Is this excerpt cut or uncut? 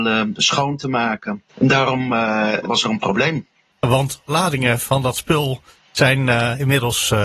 cut